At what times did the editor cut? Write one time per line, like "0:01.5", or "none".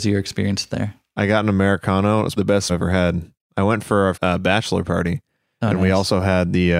0:02.4
0:02.7
0:04.1